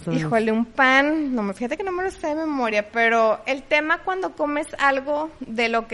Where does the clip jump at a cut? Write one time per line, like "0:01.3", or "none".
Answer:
none

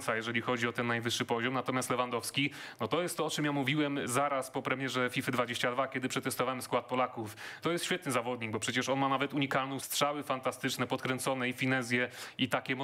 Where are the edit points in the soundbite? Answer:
0:07.6
0:09.8

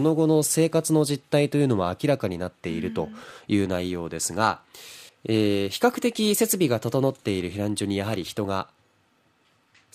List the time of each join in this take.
0:05.1

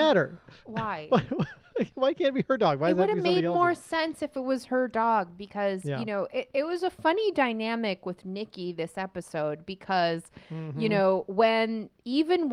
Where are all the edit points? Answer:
none

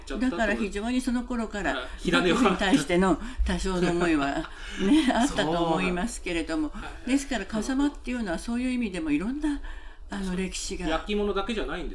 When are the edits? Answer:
none

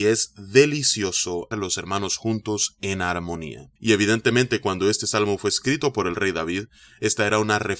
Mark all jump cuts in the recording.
0:01.5
0:03.8

